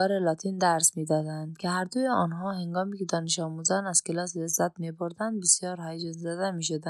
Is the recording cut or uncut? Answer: uncut